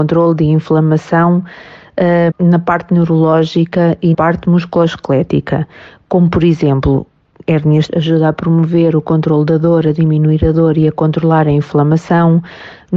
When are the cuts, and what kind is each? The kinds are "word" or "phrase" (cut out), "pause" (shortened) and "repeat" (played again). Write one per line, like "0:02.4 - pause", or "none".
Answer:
0:02.3 - word
0:04.1 - word
0:07.9 - word